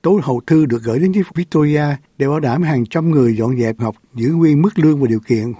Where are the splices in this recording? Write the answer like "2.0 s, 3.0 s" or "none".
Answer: 1.3 s, 3.8 s